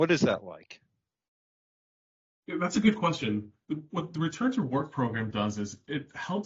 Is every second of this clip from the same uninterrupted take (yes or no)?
yes